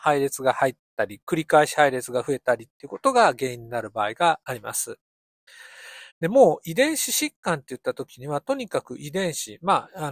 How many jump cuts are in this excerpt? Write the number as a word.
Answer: one